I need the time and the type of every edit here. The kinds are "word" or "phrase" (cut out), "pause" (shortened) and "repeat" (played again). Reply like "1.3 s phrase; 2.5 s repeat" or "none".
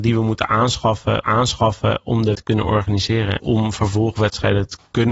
1.2 s repeat; 2.4 s word; 3.4 s word

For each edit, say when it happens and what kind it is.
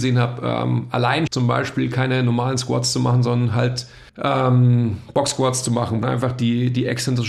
1.3 s word; 4.1 s pause; 6.0 s word

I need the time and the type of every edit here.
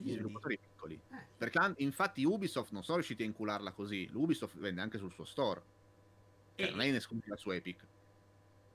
1.5 s word

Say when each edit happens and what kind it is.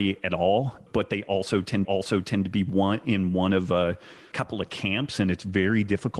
1.8 s repeat

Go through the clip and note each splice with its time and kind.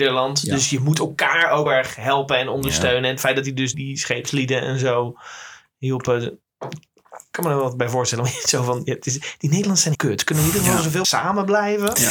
1.7 s word; 3.7 s word; 9.9 s word; 11.0 s word

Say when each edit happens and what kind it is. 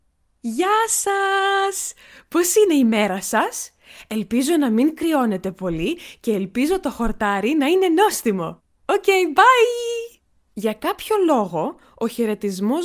10.4 s pause

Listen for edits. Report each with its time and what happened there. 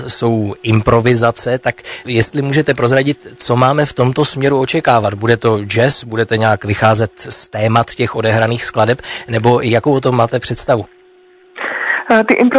none

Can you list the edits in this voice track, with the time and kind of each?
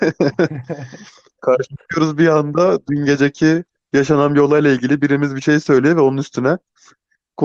none

